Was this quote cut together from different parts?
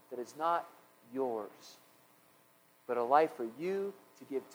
no; 0 cuts

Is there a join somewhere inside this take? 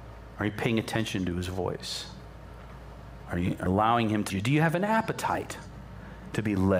yes; 2 cuts; at 3.7 s, 4.3 s

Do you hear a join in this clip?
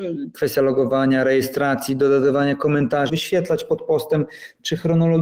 yes; 1 cut; at 3.1 s

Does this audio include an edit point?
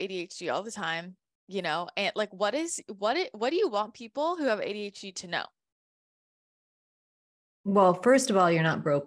no; 0 cuts

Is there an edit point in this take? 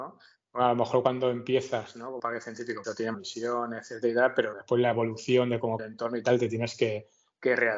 yes; 5 cuts; at 2.2 s, 2.8 s, 3.1 s, 4.5 s, 5.8 s

